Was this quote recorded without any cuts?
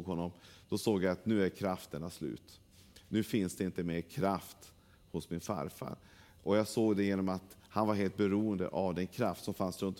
yes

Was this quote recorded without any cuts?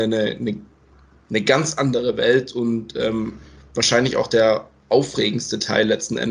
yes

